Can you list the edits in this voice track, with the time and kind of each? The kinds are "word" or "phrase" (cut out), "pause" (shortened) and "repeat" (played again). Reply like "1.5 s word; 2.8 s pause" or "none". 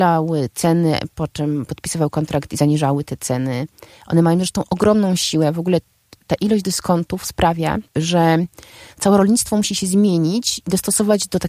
none